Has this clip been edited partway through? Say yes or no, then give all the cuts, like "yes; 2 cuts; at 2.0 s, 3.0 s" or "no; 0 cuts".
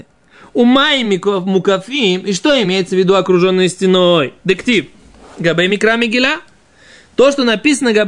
no; 0 cuts